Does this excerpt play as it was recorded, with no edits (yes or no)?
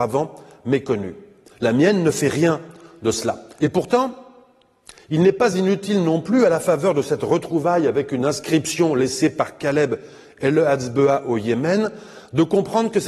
yes